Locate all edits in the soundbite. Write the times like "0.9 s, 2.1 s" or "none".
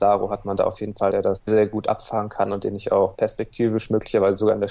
1.1 s, 1.5 s